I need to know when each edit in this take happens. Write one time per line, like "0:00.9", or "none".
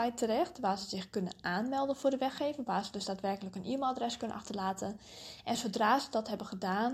none